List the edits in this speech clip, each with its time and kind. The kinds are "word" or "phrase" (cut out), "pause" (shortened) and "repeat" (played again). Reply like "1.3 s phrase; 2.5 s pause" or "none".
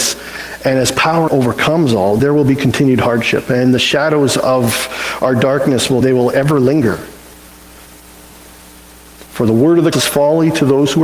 1.3 s word; 2.2 s word; 6.0 s word; 9.9 s word